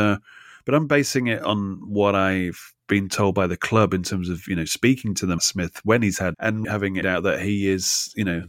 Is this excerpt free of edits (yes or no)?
no